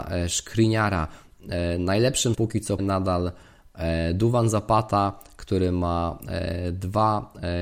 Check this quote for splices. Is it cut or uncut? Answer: cut